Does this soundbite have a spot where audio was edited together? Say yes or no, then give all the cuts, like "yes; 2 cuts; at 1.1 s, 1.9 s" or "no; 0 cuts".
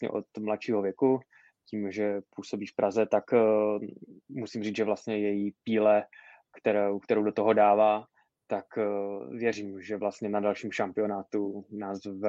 no; 0 cuts